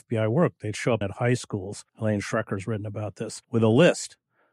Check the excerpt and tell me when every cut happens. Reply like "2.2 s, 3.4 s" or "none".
1.0 s, 1.9 s, 3.4 s